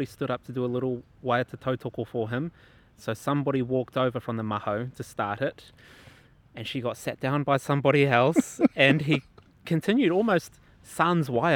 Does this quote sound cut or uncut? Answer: uncut